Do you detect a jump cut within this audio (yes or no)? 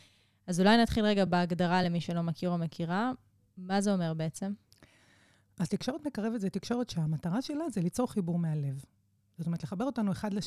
no